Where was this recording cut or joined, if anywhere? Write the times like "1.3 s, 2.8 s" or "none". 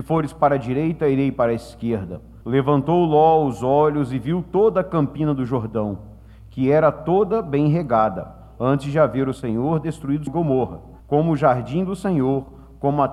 2.4 s, 10.3 s, 11.0 s